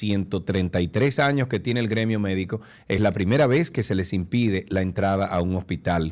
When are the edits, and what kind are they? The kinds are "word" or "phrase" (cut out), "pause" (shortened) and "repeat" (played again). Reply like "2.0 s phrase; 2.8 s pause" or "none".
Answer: none